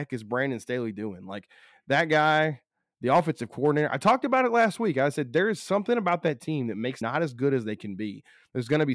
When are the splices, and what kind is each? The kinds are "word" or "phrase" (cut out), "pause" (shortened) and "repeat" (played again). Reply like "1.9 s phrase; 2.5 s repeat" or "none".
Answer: 7.0 s word